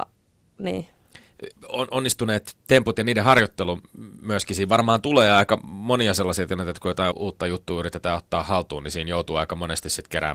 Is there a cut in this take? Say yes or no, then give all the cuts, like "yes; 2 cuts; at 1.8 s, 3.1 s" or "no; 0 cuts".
yes; 3 cuts; at 1.6 s, 2.6 s, 7.1 s